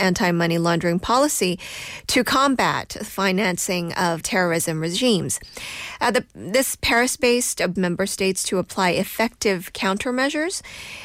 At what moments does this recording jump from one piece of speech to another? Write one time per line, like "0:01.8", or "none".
0:04.2
0:07.8